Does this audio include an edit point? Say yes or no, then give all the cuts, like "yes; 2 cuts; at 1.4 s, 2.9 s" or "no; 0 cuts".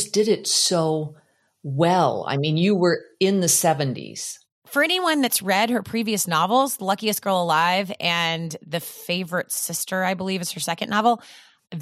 no; 0 cuts